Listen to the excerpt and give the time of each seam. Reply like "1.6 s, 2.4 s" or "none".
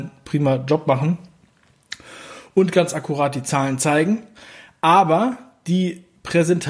none